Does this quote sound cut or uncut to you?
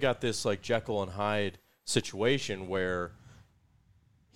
uncut